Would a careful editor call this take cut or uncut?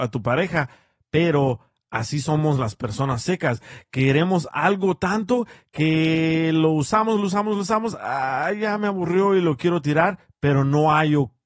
uncut